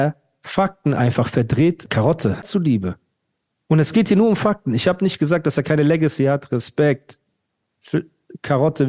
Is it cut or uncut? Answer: uncut